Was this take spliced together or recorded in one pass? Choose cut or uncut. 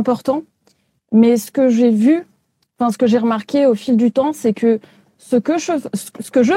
uncut